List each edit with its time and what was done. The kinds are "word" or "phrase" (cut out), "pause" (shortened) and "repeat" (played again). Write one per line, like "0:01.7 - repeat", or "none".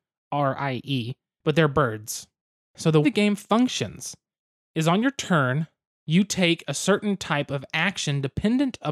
0:03.0 - word